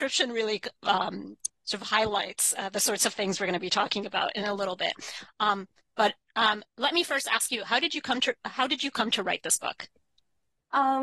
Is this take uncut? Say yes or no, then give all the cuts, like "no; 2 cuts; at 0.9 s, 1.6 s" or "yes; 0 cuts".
yes; 0 cuts